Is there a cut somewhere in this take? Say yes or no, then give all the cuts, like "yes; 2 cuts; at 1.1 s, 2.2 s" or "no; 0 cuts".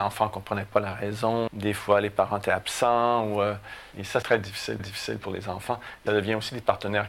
yes; 4 cuts; at 1.5 s, 4.2 s, 4.8 s, 6.1 s